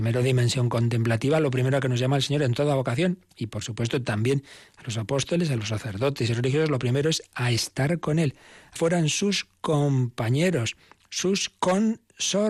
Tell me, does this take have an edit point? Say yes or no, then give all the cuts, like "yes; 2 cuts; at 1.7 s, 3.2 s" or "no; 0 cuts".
yes; 2 cuts; at 5.6 s, 8.8 s